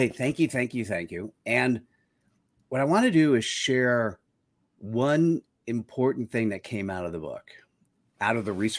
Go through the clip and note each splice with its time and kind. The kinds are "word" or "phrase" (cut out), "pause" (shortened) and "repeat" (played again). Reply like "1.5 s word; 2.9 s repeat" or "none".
none